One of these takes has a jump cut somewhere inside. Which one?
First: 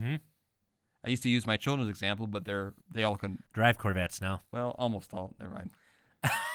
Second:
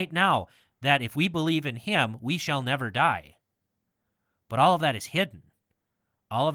first; 3 cuts; at 2.8 s, 3.5 s, 4.5 s

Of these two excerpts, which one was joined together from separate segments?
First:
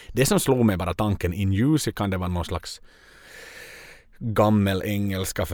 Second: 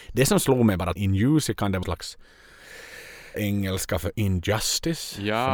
second; 3 cuts; at 1.0 s, 1.8 s, 3.3 s

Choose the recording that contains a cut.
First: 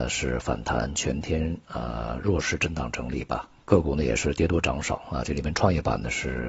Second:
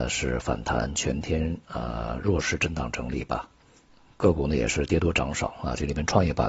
first; 1 cut; at 3.5 s

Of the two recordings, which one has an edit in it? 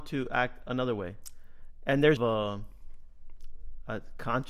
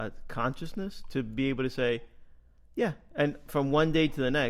first; 1 cut; at 2.2 s

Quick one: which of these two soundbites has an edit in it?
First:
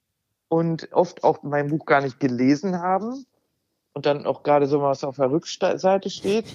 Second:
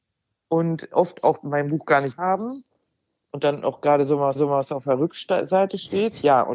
second; 2 cuts; at 2.2 s, 4.3 s

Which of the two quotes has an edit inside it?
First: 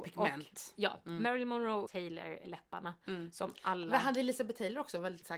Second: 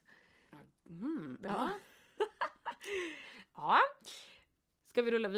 first; 2 cuts; at 1.9 s, 2.4 s

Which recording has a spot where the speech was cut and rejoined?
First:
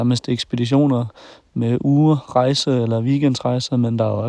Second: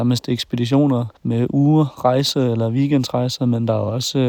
second; 1 cut; at 1.2 s

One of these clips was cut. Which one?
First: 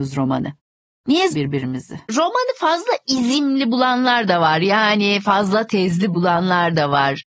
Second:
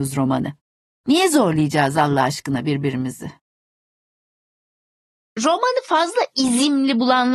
first; 2 cuts; at 1.3 s, 2.1 s

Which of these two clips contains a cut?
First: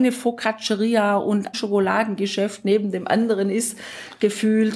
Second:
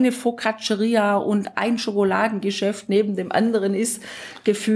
first; 1 cut; at 1.5 s

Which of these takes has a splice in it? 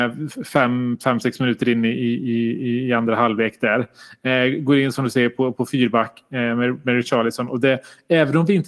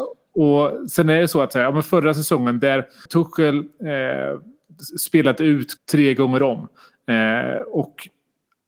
second; 2 cuts; at 3.1 s, 5.8 s

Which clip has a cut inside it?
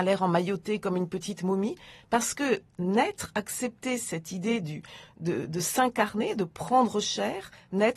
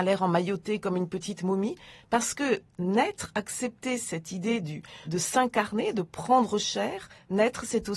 second; 1 cut; at 5.0 s

